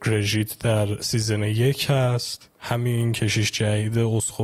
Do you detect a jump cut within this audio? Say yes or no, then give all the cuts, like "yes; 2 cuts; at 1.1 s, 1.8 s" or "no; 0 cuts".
yes; 1 cut; at 2.6 s